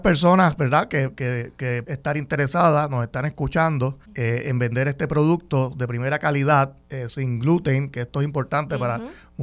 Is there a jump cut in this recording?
yes; 3 cuts; at 1.8 s, 4.0 s, 6.8 s

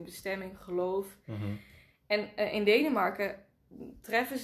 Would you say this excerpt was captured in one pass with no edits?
yes; 0 cuts

